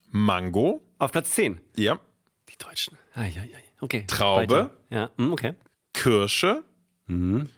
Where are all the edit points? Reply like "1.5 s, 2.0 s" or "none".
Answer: 5.7 s